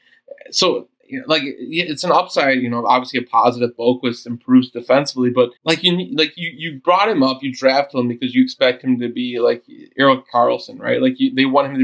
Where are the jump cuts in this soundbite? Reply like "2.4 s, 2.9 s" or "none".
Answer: 5.6 s